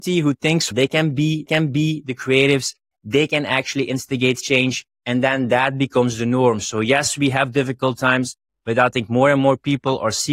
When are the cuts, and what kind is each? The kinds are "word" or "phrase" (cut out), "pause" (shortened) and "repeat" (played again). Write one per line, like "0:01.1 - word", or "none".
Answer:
0:01.5 - repeat